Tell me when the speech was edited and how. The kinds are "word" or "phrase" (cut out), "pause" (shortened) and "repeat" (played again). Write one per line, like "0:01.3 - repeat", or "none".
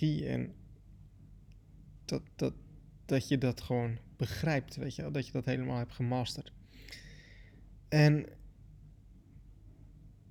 0:02.0 - pause
0:07.8 - pause